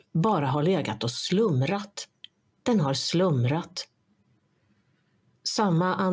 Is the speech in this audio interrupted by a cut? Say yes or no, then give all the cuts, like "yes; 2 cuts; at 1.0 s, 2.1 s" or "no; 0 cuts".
no; 0 cuts